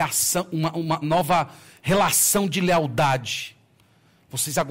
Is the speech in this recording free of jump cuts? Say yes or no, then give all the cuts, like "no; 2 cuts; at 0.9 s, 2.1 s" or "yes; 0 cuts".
no; 1 cut; at 1.0 s